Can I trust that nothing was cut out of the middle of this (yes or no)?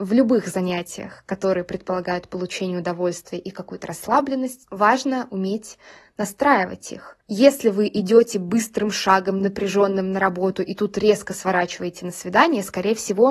yes